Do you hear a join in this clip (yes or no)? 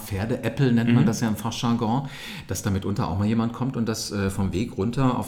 no